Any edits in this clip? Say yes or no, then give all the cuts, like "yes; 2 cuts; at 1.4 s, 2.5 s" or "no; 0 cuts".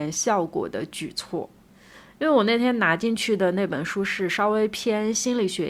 no; 0 cuts